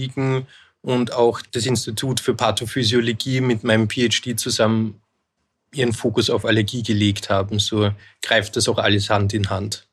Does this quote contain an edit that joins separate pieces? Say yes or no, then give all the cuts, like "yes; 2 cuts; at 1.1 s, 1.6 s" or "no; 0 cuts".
no; 0 cuts